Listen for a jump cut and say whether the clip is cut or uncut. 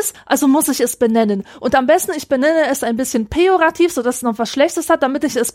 uncut